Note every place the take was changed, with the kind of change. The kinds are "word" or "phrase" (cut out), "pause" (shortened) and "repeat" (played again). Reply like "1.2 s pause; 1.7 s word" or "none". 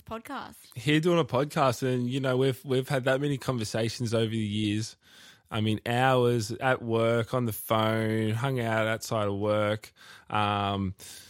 none